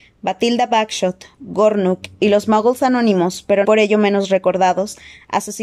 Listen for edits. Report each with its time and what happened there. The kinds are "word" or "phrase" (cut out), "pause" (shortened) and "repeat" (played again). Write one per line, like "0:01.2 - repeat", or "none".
0:03.6 - word